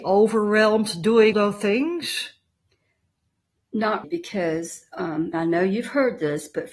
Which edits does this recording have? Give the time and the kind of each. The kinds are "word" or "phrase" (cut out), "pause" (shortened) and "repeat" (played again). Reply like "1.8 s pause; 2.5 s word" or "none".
1.3 s word; 4.0 s word; 5.3 s word